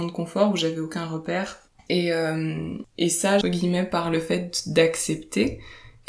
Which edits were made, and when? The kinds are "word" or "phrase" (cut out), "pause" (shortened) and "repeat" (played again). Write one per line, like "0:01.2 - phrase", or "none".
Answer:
0:01.7 - pause
0:03.4 - phrase